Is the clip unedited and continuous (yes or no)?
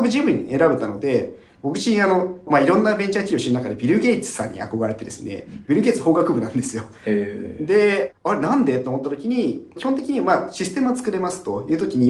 no